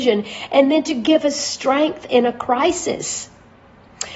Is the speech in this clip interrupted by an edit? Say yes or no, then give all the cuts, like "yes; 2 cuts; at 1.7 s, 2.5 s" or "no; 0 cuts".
no; 0 cuts